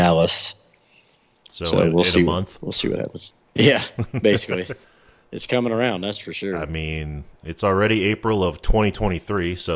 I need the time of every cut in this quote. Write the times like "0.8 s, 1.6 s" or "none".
4.8 s